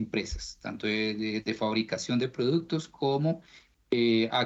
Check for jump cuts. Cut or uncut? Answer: uncut